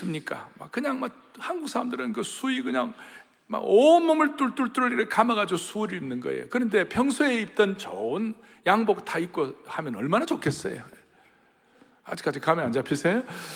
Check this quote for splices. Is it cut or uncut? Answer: uncut